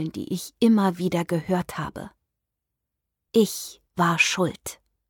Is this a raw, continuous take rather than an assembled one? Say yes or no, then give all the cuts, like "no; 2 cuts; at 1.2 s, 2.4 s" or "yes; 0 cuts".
no; 1 cut; at 3.9 s